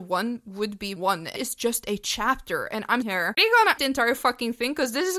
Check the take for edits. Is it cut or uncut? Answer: cut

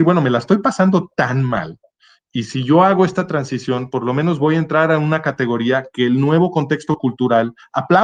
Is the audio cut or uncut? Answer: uncut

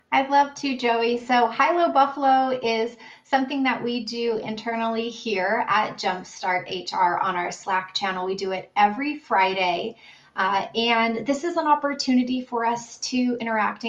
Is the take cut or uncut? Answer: uncut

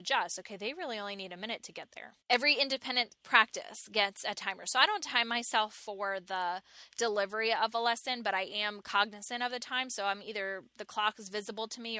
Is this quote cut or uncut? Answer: cut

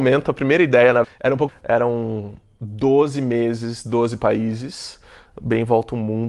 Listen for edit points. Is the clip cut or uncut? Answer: cut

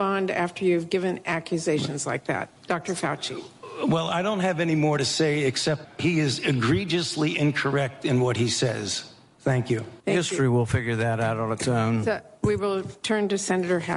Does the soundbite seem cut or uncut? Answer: cut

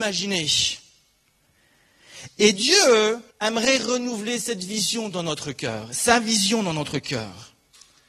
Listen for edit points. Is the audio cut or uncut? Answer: cut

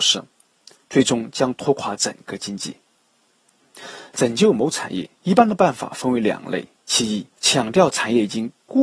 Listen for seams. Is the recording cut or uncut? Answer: cut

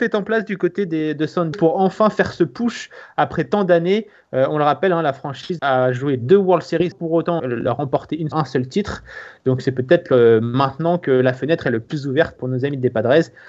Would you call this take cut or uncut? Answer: cut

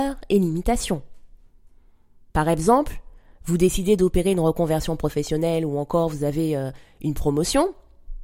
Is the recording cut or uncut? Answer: uncut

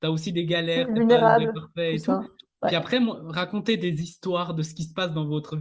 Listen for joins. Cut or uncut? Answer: uncut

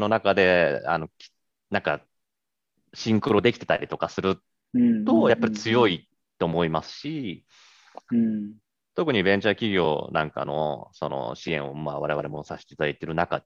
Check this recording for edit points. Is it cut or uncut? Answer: uncut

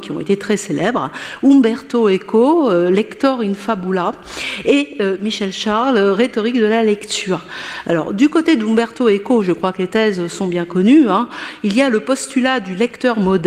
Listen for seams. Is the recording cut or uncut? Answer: uncut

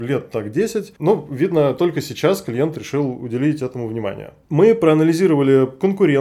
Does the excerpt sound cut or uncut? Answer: uncut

